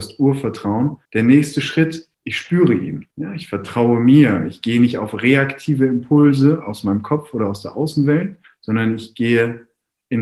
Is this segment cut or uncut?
cut